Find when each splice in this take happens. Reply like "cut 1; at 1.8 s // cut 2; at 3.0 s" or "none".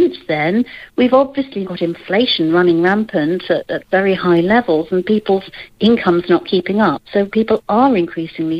cut 1; at 1.6 s